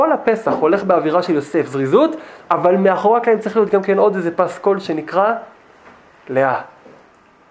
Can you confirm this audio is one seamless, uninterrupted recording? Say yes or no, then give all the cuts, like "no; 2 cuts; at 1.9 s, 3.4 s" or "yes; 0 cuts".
yes; 0 cuts